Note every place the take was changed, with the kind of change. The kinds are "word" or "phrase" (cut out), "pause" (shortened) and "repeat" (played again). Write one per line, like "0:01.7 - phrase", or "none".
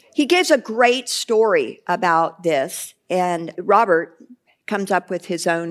0:03.5 - word